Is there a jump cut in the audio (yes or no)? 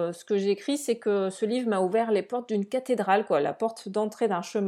no